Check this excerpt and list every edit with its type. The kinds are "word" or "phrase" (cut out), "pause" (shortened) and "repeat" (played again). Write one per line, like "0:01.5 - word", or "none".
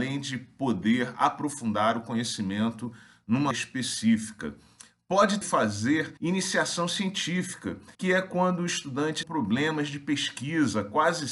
0:03.5 - word
0:05.4 - word
0:06.2 - pause
0:07.9 - pause
0:09.2 - phrase